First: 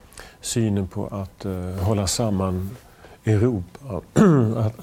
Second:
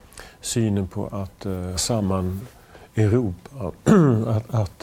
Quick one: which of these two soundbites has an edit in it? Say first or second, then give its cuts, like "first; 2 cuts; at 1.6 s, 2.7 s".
second; 1 cut; at 1.7 s